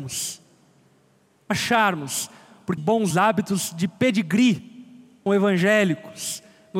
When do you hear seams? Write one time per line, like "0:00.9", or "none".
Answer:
0:01.5
0:02.8
0:03.1
0:05.3